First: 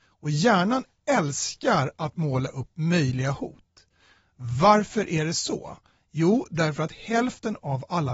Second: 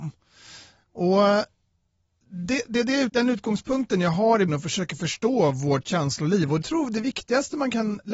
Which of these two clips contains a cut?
second; 4 cuts; at 2.7 s, 3.1 s, 4.5 s, 6.6 s

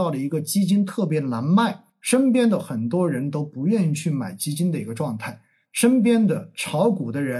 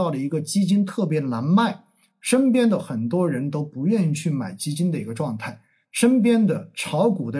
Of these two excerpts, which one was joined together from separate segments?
first; 1 cut; at 1.9 s

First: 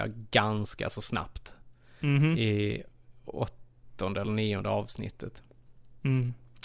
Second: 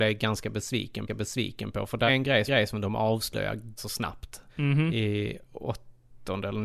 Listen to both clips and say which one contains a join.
second; 6 cuts; at 1.1 s, 2.1 s, 2.5 s, 3.8 s, 4.5 s, 5.5 s

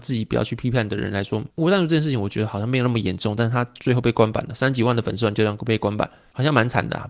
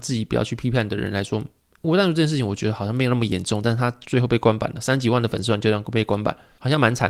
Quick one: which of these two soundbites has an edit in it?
first; 1 cut; at 1.5 s

